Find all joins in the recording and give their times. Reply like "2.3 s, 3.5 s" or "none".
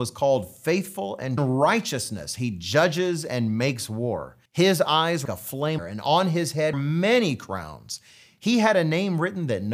1.4 s, 4.5 s, 5.3 s, 5.8 s, 6.7 s